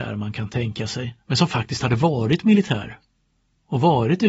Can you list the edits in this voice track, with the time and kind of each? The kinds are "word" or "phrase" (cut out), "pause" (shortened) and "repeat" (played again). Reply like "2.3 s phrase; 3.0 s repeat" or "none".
1.2 s pause